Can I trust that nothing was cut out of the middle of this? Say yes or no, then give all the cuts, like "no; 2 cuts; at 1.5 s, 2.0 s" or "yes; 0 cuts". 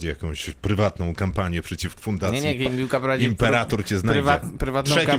no; 1 cut; at 2.0 s